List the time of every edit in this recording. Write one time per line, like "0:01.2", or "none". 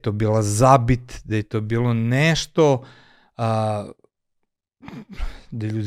none